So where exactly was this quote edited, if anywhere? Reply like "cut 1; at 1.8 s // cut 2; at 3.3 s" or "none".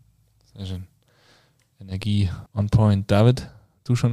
cut 1; at 2.5 s